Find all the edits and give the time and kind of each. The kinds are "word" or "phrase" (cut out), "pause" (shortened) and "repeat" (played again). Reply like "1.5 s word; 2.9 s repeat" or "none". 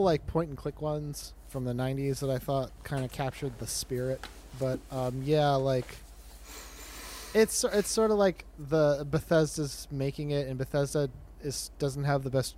none